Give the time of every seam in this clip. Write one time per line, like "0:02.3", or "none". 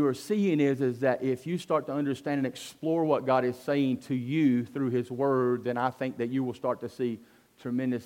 none